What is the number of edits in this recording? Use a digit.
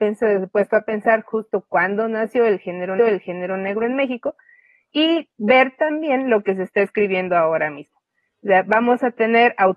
1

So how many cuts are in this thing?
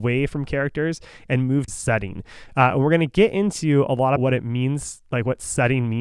2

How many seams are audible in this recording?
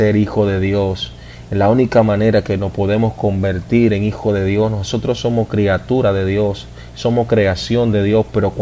0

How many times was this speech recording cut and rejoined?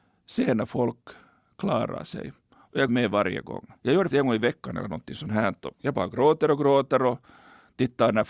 4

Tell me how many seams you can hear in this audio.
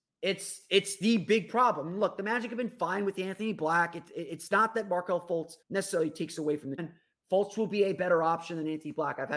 2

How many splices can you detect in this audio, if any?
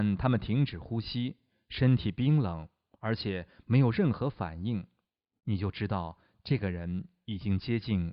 0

